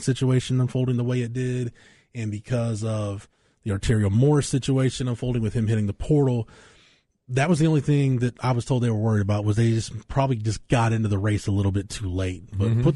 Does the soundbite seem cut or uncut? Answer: uncut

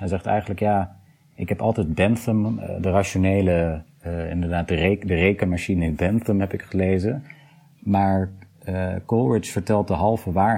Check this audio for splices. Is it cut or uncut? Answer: uncut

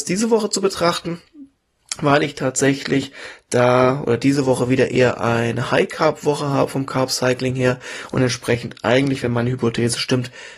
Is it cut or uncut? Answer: uncut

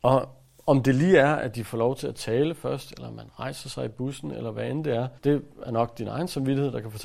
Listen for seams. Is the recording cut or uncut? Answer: cut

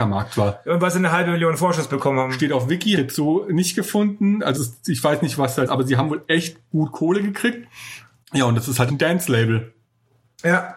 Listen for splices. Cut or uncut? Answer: cut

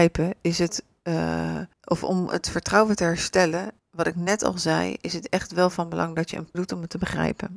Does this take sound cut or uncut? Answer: cut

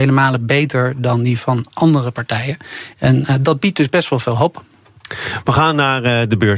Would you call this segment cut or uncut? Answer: uncut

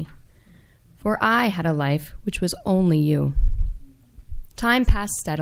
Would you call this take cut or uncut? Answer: cut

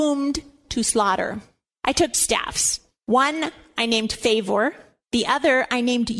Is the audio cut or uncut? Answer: cut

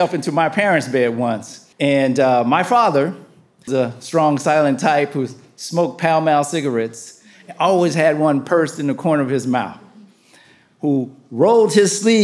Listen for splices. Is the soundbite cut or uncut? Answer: cut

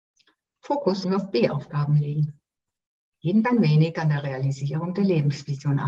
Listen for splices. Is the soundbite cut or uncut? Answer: cut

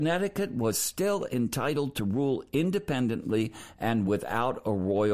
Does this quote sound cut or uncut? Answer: uncut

